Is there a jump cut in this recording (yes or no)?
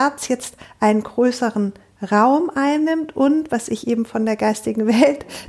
no